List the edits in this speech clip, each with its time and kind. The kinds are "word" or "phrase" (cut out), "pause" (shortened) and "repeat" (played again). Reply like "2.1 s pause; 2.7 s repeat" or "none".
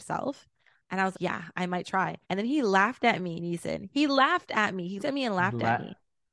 1.1 s word; 1.8 s word; 2.2 s pause; 5.0 s word